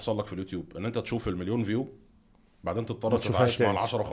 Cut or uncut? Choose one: uncut